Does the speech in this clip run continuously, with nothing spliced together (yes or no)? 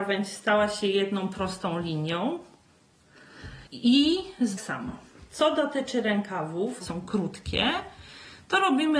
no